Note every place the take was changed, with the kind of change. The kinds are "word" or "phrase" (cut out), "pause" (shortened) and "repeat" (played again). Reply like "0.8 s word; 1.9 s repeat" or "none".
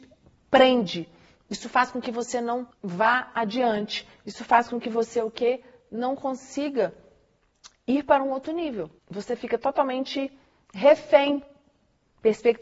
2.7 s pause; 9.0 s pause